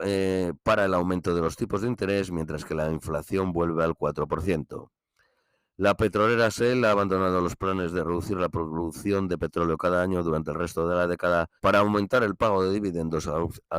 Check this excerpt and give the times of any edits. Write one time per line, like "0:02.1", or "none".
0:11.6